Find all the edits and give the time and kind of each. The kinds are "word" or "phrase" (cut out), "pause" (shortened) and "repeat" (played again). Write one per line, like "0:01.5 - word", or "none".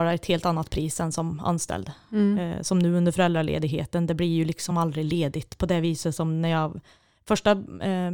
none